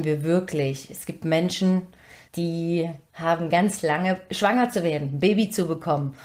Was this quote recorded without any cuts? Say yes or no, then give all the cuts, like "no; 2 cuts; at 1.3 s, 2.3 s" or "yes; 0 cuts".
no; 1 cut; at 4.3 s